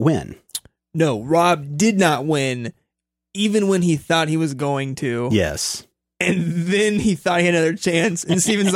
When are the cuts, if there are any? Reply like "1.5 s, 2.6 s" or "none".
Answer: none